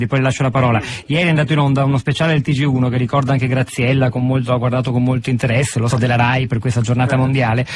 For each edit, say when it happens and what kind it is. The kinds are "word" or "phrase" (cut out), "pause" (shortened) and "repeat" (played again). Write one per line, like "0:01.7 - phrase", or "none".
0:05.9 - word